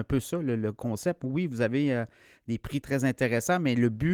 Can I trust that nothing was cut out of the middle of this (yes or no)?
no